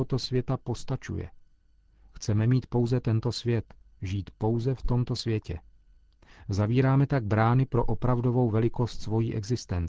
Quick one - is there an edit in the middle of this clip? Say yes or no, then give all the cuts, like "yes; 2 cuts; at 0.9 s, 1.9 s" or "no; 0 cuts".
no; 0 cuts